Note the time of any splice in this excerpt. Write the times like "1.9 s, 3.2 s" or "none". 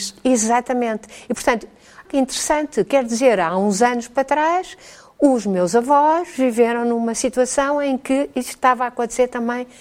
2.1 s